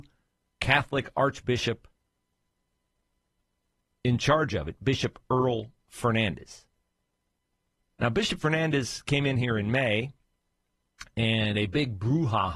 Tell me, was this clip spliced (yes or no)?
no